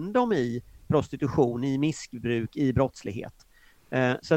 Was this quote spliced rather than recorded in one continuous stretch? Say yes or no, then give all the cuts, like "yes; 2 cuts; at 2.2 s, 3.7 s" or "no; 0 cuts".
no; 0 cuts